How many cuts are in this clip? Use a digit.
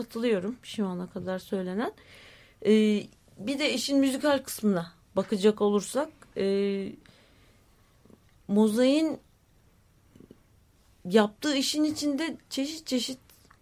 0